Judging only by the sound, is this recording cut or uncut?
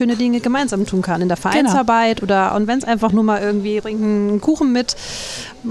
cut